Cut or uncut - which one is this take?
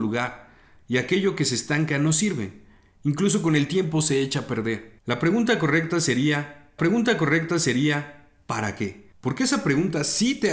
cut